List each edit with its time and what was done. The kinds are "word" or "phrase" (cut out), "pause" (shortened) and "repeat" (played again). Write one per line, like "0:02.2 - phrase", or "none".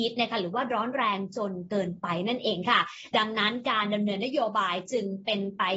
none